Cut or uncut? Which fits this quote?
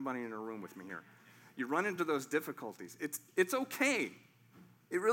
uncut